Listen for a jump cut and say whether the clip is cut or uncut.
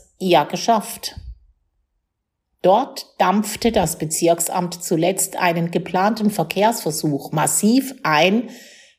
uncut